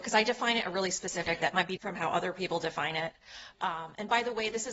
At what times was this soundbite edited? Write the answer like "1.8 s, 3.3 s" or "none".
1.4 s, 1.8 s